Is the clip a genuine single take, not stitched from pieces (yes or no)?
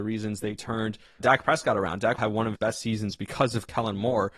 no